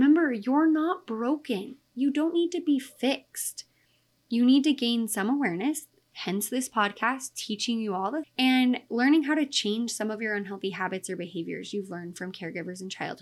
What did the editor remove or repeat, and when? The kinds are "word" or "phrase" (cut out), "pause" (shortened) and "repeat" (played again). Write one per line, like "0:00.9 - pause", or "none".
0:08.2 - word

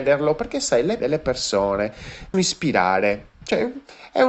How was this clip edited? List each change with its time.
0:01.0 - word
0:02.3 - phrase

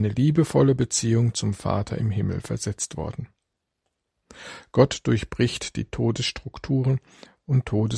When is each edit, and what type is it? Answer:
none

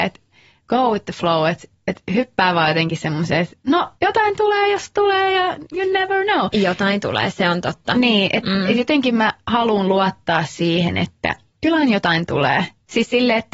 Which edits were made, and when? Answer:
0:04.0 - pause
0:11.5 - pause

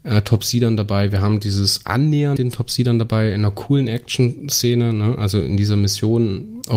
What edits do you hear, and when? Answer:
0:02.4 - word

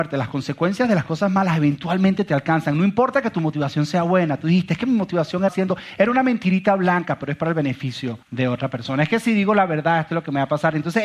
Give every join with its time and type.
0:05.5 - phrase
0:08.2 - pause

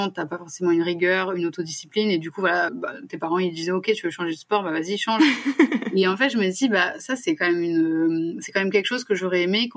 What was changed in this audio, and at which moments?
0:02.7 - word

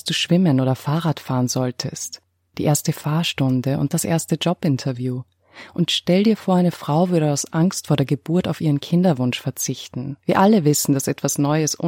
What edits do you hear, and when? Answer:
0:10.2 - pause

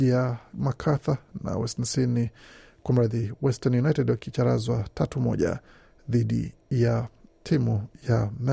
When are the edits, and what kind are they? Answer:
none

